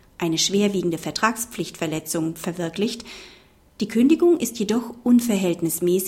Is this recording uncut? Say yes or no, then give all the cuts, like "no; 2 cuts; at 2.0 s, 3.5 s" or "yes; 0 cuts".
yes; 0 cuts